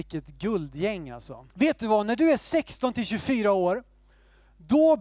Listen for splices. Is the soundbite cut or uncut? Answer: cut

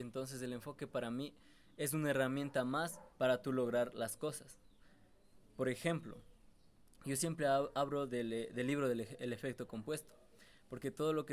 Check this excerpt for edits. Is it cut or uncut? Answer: cut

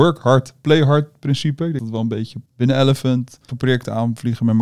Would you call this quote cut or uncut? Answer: cut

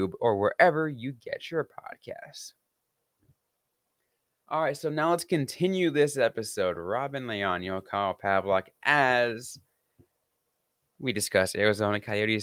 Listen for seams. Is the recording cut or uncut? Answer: uncut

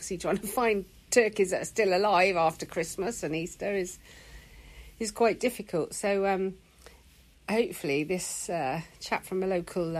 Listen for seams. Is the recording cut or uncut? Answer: uncut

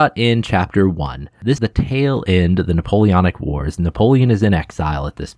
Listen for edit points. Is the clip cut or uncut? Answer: cut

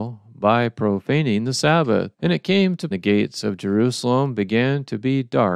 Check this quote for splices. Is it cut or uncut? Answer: cut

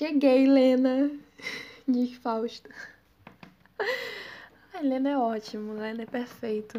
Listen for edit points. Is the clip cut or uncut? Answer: uncut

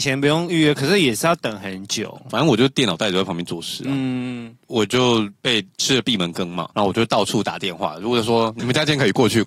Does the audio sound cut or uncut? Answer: cut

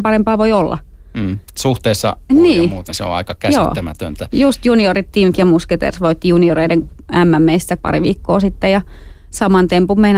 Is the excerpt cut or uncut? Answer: cut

